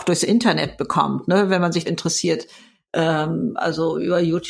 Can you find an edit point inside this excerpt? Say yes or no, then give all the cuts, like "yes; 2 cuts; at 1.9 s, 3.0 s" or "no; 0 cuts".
yes; 1 cut; at 1.8 s